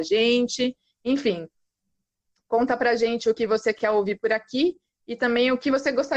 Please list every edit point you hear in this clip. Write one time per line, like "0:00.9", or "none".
none